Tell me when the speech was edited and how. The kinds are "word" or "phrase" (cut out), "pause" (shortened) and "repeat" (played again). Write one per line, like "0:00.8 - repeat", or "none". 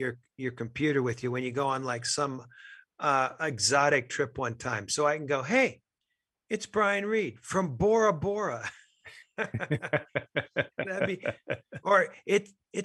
none